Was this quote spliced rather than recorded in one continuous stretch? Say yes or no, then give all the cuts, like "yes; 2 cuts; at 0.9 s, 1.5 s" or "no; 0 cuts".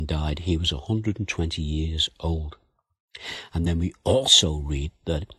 no; 0 cuts